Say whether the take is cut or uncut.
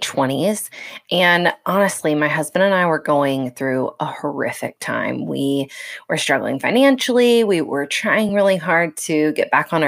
uncut